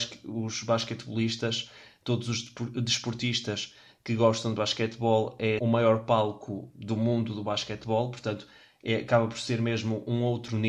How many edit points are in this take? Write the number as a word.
two